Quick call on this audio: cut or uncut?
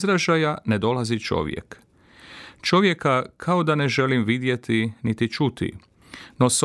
uncut